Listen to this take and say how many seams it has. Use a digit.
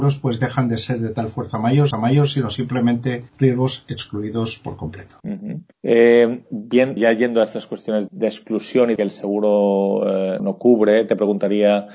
8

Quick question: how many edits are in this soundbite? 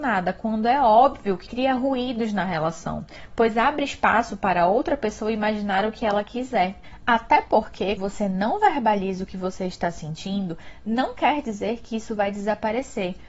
2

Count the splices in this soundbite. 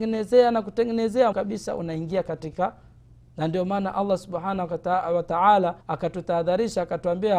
3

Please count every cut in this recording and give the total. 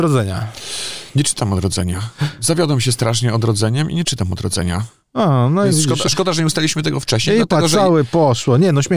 0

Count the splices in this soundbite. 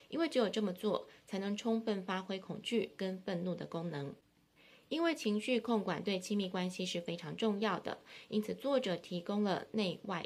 1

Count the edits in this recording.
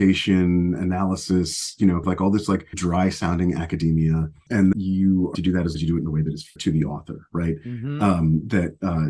6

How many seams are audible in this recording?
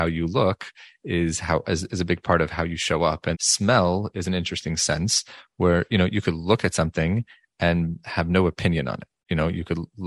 1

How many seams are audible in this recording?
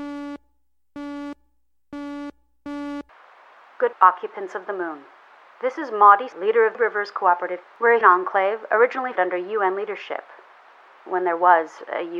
6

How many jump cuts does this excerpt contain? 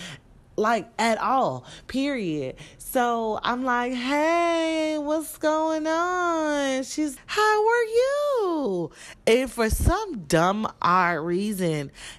1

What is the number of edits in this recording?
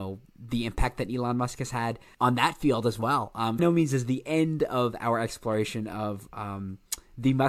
1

